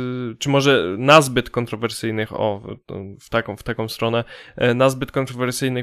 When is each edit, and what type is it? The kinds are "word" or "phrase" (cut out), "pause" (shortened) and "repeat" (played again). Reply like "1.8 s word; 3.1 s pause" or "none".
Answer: none